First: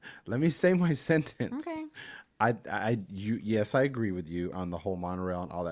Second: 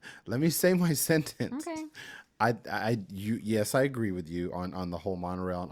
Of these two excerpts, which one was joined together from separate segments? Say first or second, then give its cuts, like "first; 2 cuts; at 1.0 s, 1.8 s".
first; 1 cut; at 4.5 s